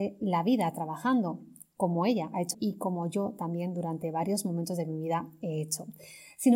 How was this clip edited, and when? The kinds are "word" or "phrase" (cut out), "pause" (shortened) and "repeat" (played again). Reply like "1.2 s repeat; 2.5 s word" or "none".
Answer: 2.5 s word

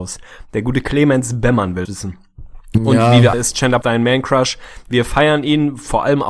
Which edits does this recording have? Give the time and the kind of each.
1.8 s word; 3.3 s phrase; 3.8 s word

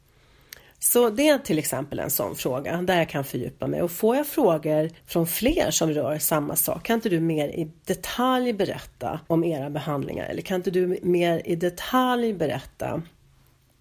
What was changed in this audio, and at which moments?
5.0 s pause; 9.2 s pause

